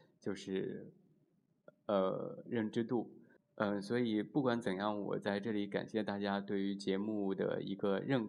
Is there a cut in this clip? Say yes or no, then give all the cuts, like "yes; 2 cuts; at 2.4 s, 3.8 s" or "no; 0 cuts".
yes; 1 cut; at 3.4 s